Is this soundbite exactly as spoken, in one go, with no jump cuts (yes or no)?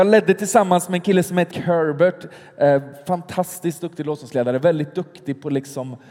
no